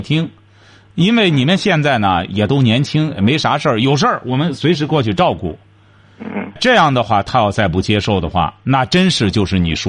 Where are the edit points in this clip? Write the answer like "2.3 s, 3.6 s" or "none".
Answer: 6.6 s